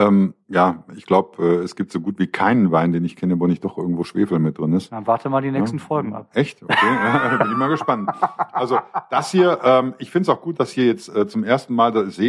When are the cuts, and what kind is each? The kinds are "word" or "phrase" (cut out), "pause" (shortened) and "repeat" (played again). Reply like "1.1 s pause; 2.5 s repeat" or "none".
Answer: none